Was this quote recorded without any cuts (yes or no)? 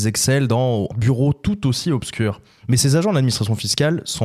no